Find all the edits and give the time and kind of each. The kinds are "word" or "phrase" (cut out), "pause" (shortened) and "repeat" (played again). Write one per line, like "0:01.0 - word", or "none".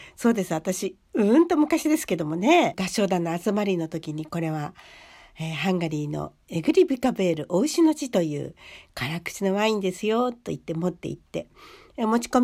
none